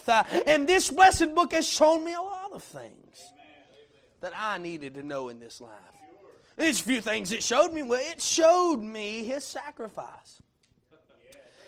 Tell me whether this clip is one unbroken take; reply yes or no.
yes